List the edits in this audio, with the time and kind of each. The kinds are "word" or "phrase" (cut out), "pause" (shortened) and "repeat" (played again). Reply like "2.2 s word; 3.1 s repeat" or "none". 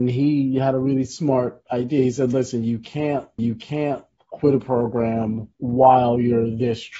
3.4 s repeat; 5.5 s pause